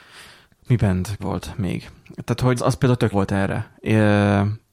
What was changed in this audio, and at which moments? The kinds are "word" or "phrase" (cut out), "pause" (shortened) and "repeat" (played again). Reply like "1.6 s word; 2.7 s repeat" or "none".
1.2 s word; 2.6 s word; 3.1 s word